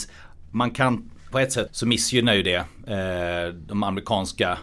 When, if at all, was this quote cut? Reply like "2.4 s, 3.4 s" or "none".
1.3 s, 1.7 s